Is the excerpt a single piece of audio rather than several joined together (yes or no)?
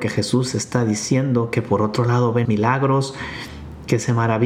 no